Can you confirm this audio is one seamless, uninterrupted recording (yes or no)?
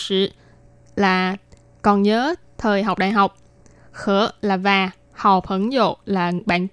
yes